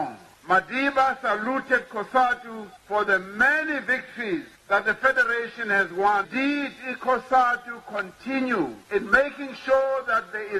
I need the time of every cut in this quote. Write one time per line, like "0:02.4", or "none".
none